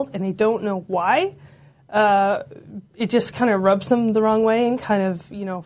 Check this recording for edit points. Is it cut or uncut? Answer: uncut